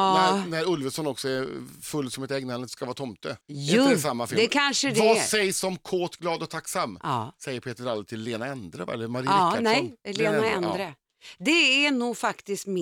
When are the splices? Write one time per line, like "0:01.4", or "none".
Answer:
0:03.4

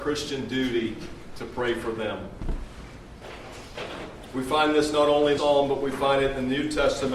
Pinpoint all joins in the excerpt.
0:05.4

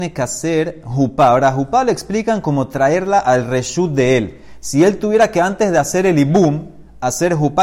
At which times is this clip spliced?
none

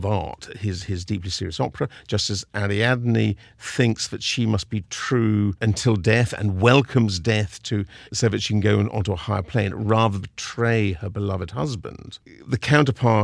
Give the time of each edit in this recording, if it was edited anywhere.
0:08.1
0:10.2

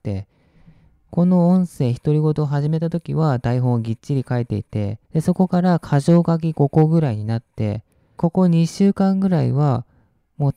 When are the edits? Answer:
0:05.0
0:08.2

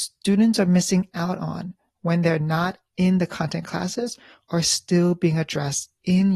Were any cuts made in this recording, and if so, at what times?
none

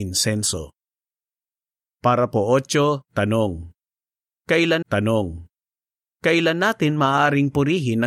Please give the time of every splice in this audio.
0:04.8

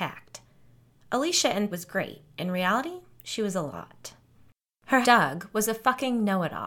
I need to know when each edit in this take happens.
0:01.7
0:02.3
0:05.0

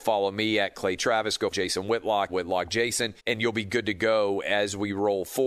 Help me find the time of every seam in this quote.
0:01.5
0:02.3
0:03.2

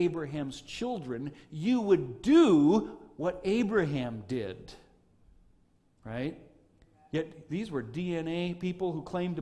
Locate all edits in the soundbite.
none

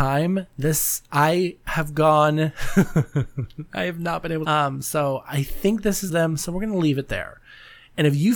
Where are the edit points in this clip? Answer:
0:04.4
0:06.1

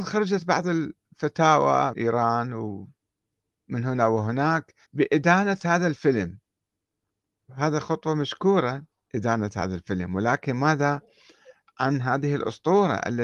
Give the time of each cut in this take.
0:01.9
0:04.8
0:07.5
0:08.9

